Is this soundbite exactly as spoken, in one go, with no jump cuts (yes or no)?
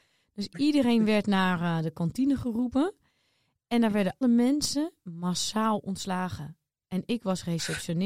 no